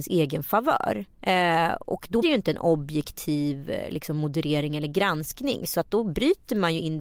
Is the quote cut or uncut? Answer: cut